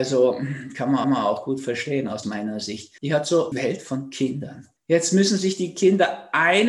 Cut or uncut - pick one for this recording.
cut